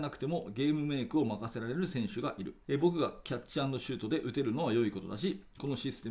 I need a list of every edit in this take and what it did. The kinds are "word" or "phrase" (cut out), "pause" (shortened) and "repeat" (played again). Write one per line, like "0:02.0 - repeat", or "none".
0:02.6 - pause

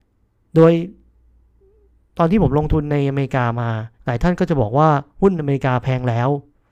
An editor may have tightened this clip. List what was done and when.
0:04.0 - pause

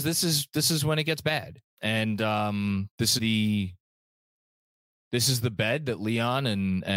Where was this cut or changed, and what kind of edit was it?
0:01.7 - pause
0:03.2 - word

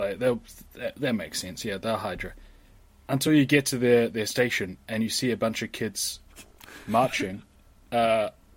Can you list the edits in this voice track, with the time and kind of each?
none

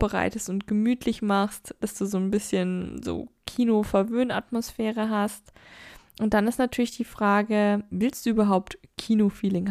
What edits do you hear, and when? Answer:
none

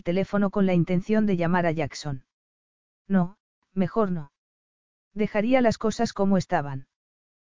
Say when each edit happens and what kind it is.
none

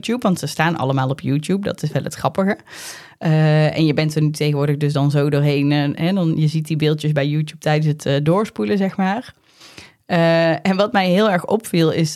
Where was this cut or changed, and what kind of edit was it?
none

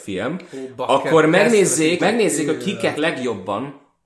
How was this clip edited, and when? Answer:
0:02.0 - word
0:02.9 - word

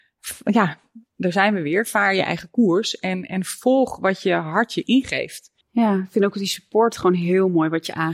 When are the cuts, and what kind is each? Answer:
0:05.6 - pause

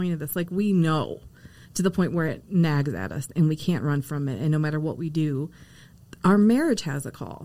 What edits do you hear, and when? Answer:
none

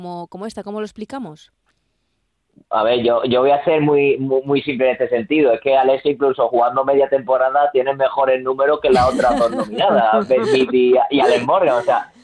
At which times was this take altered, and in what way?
none

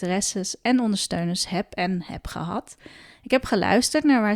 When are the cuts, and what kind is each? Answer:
none

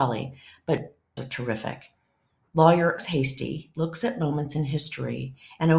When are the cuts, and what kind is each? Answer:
0:01.2 - phrase
0:03.0 - word

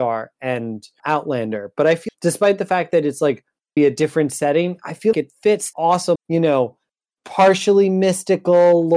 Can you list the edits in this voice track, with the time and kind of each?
0:01.0 - word
0:02.1 - word
0:03.8 - word
0:05.1 - word
0:05.7 - word
0:06.2 - word

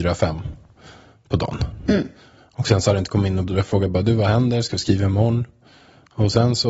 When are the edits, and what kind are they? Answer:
0:03.5 - word

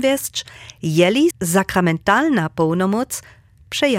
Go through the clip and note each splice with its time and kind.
0:01.3 - word

